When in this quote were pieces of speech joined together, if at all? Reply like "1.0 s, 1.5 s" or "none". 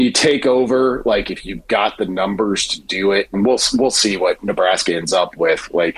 none